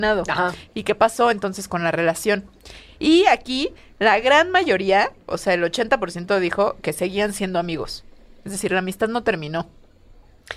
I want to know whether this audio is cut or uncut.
uncut